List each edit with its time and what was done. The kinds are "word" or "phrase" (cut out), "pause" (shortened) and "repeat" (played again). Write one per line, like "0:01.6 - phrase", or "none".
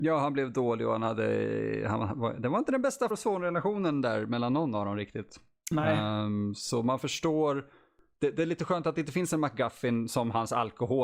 0:03.1 - word